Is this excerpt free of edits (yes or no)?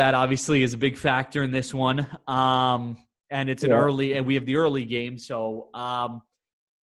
yes